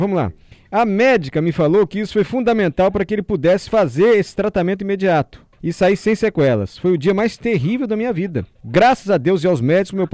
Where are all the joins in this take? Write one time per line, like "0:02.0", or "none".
0:05.5
0:08.5